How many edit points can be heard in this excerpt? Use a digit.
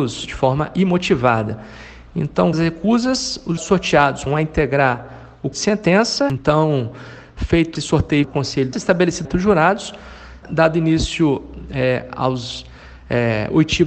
9